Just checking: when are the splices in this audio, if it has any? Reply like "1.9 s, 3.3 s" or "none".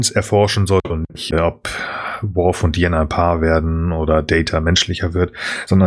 1.3 s